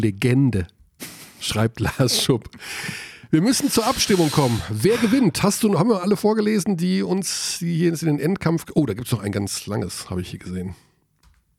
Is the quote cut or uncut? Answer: uncut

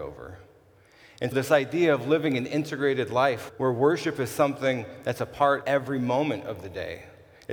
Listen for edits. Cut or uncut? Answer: cut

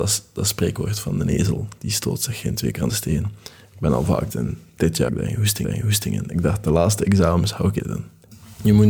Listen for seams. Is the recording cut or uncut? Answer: cut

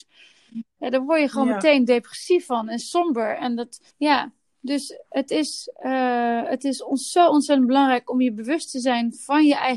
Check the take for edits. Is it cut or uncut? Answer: cut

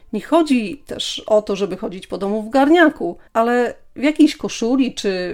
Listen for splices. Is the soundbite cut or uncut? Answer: cut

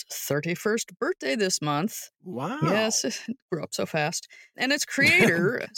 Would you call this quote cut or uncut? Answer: uncut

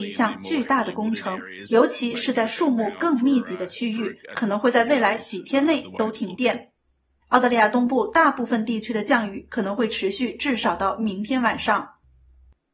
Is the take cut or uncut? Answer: cut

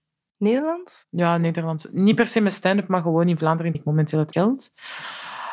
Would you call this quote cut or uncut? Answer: cut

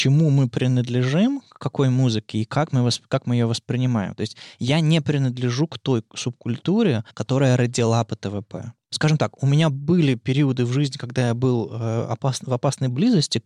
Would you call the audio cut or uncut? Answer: cut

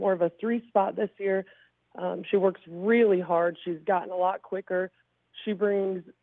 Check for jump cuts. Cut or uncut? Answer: uncut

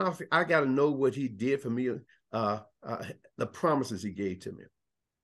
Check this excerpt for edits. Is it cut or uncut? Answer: uncut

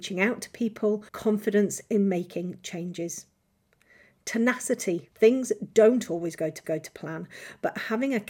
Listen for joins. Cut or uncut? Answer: cut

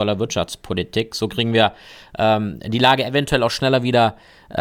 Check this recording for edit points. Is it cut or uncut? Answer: uncut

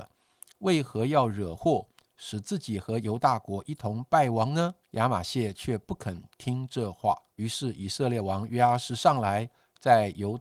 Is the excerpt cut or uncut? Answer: cut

